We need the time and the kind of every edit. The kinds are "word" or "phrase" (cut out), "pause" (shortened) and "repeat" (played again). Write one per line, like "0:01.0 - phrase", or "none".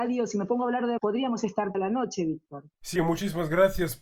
0:01.0 - word
0:01.7 - word
0:03.0 - word